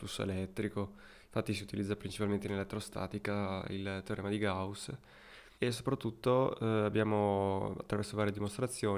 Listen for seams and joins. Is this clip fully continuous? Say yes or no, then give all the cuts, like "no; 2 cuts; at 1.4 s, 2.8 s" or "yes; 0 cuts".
no; 1 cut; at 5.5 s